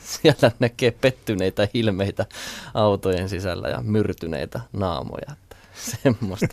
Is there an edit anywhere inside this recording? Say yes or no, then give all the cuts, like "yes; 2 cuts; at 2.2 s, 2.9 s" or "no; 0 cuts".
yes; 1 cut; at 4.7 s